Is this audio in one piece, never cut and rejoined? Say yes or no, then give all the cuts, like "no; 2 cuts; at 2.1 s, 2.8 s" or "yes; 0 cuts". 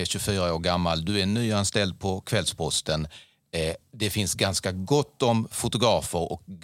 yes; 0 cuts